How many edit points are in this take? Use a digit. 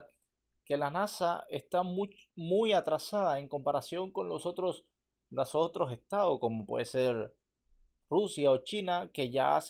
0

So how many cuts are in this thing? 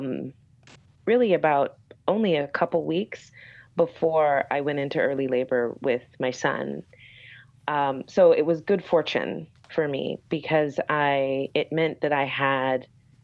0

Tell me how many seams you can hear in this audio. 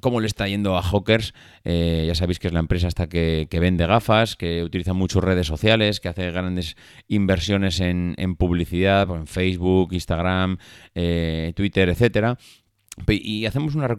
0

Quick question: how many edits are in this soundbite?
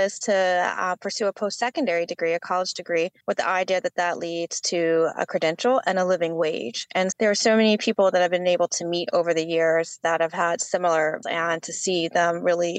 3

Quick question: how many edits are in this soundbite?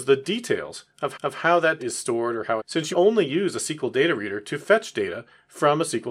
4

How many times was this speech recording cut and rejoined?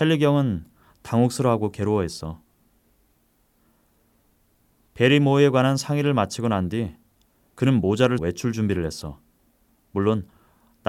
1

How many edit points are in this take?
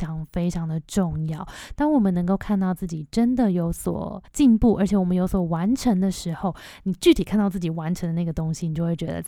1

